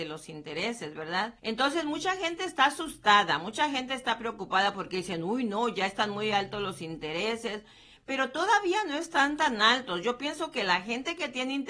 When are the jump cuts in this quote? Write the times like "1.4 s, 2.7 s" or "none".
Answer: 1.4 s